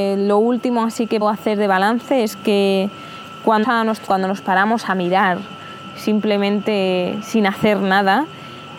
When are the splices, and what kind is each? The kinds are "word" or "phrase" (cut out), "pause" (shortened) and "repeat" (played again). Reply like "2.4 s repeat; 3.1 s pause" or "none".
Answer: 1.2 s word; 3.6 s word; 4.1 s word